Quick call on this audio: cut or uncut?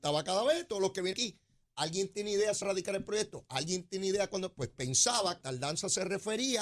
cut